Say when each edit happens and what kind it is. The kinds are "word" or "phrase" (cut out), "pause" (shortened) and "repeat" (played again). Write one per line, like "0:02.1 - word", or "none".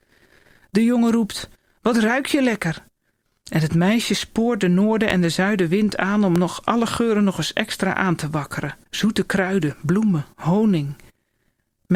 0:08.9 - pause